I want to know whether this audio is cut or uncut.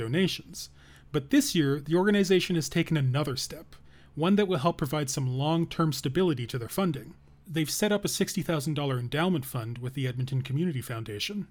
uncut